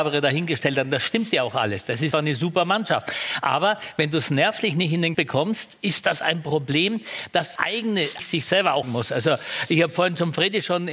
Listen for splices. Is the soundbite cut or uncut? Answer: cut